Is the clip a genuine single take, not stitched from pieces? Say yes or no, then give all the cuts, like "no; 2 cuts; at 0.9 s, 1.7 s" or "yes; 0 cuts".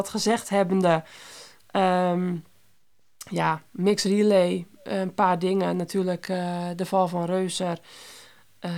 yes; 0 cuts